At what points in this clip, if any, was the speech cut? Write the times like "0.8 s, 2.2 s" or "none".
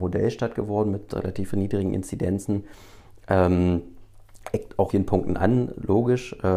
4.9 s